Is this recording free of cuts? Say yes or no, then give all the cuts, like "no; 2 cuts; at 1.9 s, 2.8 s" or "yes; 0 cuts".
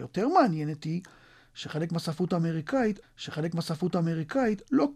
no; 1 cut; at 3.0 s